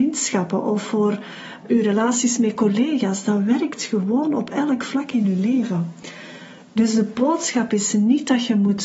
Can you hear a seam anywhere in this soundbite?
yes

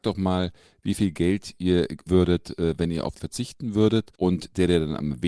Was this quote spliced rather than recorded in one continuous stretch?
yes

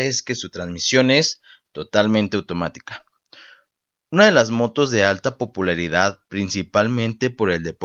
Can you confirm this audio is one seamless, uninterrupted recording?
yes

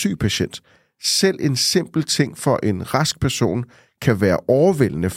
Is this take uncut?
yes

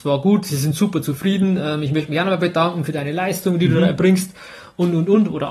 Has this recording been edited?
no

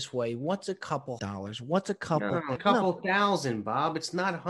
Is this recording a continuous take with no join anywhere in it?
no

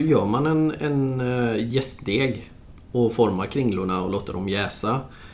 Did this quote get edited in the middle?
no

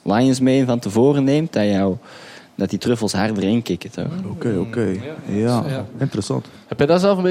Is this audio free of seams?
yes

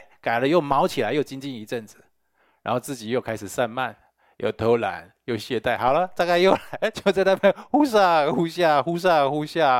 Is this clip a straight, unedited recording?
yes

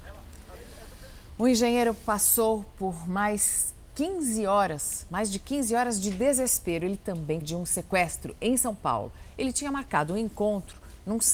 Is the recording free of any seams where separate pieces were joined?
no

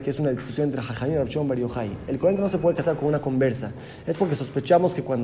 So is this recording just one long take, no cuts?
yes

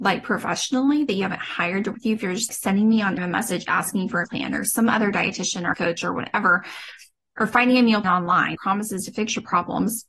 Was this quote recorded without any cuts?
no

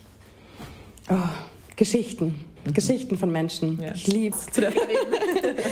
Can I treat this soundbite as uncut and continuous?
no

